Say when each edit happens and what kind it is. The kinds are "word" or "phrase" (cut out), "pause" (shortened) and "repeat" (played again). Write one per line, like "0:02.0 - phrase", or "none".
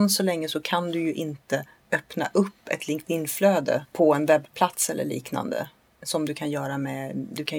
none